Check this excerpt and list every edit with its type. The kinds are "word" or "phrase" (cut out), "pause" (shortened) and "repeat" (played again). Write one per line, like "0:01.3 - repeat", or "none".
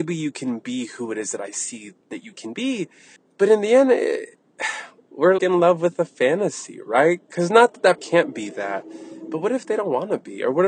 0:02.0 - pause
0:03.2 - pause
0:05.4 - word
0:08.0 - word